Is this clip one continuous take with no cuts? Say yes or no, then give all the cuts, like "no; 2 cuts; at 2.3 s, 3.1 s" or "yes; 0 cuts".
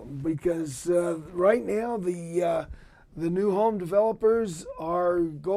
yes; 0 cuts